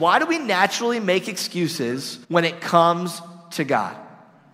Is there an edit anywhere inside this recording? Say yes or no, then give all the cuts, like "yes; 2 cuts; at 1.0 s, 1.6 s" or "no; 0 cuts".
yes; 1 cut; at 2.2 s